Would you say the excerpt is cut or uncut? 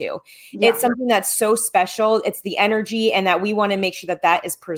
uncut